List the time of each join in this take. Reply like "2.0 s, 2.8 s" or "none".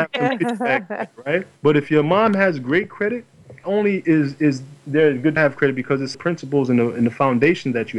1.6 s, 3.6 s, 5.4 s, 6.1 s